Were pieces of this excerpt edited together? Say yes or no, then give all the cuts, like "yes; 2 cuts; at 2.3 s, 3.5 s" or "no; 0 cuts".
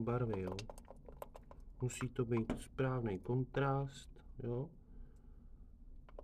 yes; 1 cut; at 4.3 s